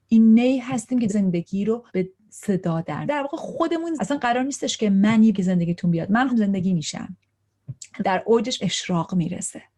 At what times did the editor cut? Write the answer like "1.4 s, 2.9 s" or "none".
1.1 s, 1.9 s, 3.0 s, 4.0 s, 5.3 s, 6.3 s, 8.0 s, 8.6 s